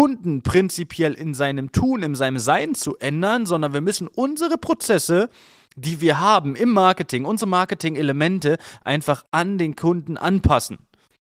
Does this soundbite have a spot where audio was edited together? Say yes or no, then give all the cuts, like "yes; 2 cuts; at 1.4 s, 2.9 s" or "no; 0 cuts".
no; 0 cuts